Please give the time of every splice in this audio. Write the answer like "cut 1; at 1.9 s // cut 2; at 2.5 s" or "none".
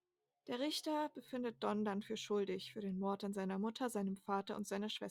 none